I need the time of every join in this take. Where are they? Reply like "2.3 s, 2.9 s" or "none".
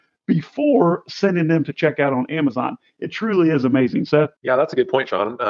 4.4 s